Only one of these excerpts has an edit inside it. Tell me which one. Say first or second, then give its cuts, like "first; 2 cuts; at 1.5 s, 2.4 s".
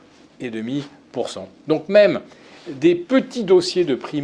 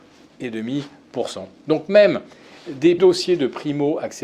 second; 1 cut; at 3.0 s